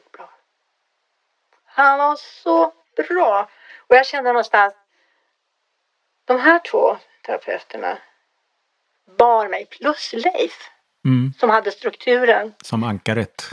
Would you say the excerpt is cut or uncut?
uncut